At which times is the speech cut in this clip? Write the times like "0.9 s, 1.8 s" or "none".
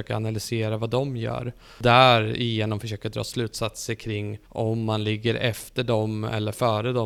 4.4 s

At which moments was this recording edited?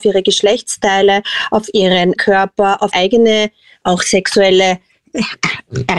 2.2 s, 2.9 s

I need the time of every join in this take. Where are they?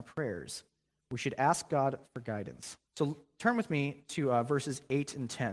2.9 s

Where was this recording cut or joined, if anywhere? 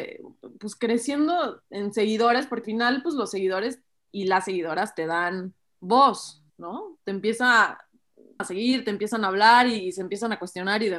2.6 s, 6.5 s, 8.4 s

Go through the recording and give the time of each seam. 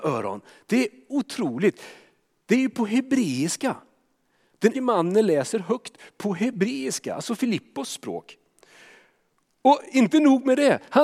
4.7 s

